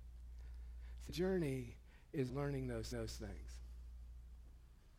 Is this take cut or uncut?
cut